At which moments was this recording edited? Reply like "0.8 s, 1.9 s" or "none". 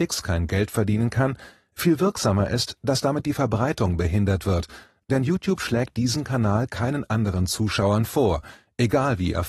none